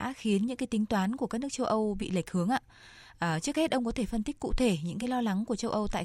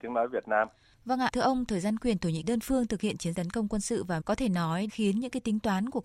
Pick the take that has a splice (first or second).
second